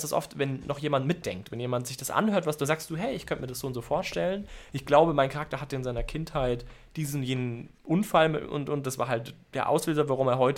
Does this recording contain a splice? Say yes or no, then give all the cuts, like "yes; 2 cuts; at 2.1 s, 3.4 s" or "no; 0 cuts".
yes; 1 cut; at 7.8 s